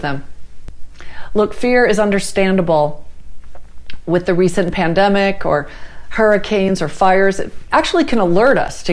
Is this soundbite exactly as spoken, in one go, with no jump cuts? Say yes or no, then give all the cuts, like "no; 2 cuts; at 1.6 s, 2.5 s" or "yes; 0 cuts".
yes; 0 cuts